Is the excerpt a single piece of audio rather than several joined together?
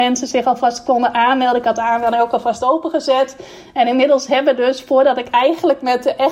yes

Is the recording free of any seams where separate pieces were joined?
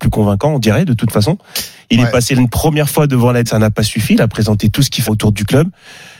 no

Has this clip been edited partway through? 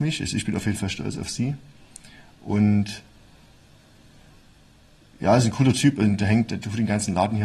no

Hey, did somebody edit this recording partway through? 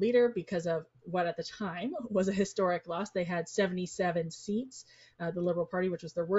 no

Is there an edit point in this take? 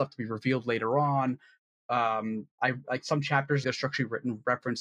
yes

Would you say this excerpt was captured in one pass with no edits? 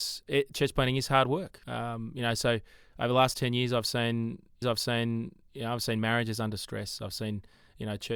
no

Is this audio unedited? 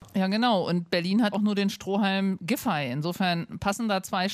no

